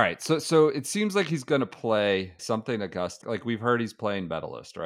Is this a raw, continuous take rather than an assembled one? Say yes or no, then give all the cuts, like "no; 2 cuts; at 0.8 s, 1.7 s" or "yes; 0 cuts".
no; 2 cuts; at 2.4 s, 3.2 s